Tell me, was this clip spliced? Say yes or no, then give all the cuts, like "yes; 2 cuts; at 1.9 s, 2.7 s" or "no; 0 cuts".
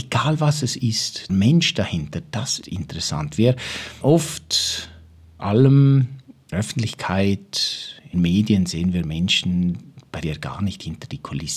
yes; 7 cuts; at 1.3 s, 2.6 s, 4.0 s, 5.4 s, 6.5 s, 8.1 s, 10.2 s